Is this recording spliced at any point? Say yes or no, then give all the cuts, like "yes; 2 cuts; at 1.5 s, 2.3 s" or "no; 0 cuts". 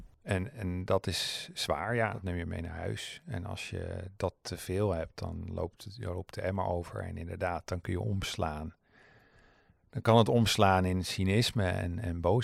no; 0 cuts